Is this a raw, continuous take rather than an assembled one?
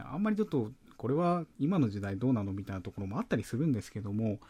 no; 1 cut; at 1.5 s

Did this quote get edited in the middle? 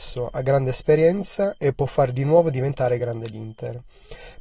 no; 0 cuts

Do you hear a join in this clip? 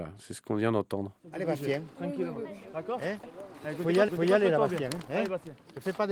yes; 3 cuts; at 1.2 s, 3.2 s, 4.1 s

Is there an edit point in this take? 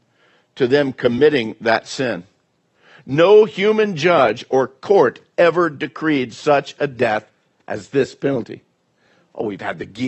no; 0 cuts

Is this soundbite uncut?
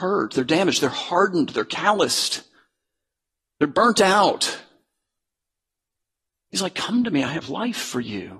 yes; 0 cuts

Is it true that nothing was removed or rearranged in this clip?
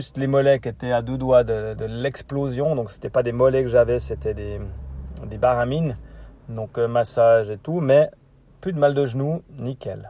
yes; 0 cuts

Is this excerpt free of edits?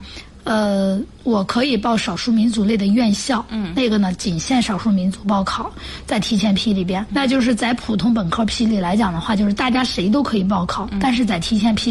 no; 1 cut; at 7.1 s

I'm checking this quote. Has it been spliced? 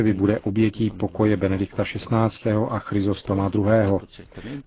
no; 0 cuts

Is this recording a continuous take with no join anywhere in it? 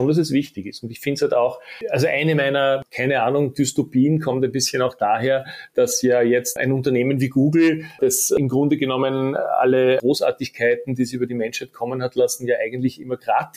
yes; 0 cuts

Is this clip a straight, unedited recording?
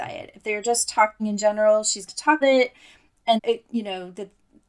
no; 4 cuts; at 1.2 s, 2.1 s, 2.4 s, 3.4 s

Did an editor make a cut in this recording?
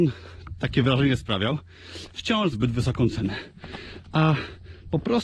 yes; 1 cut; at 2.5 s

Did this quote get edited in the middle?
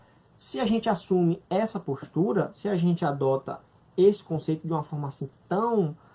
no; 0 cuts

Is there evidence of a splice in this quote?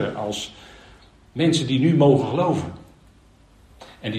no; 0 cuts

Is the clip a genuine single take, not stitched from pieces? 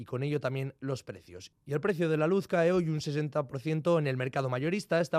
yes; 0 cuts

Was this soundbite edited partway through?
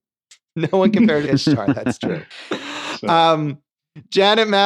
yes; 1 cut; at 1.3 s

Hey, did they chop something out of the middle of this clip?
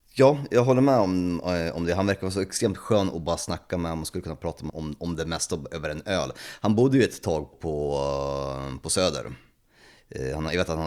yes; 2 cuts; at 4.7 s, 7.5 s

